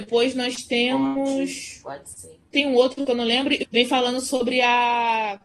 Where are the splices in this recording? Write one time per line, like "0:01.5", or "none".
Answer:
0:02.5
0:03.6